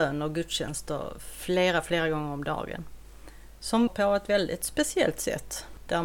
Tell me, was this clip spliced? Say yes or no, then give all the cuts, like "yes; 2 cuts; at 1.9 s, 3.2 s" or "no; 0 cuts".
yes; 1 cut; at 3.9 s